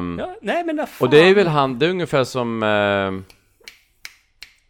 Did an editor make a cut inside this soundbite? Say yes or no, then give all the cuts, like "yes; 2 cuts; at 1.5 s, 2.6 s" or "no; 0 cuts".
no; 0 cuts